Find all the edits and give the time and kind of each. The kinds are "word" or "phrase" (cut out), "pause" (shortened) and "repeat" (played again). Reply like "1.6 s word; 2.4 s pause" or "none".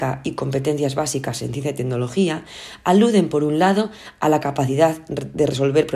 none